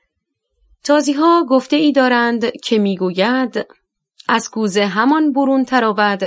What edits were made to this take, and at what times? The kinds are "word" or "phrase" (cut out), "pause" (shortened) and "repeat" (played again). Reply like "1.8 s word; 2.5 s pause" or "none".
none